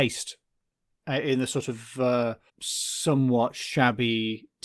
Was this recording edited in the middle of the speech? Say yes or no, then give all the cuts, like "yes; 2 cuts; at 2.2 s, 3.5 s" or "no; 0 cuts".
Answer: yes; 1 cut; at 2.5 s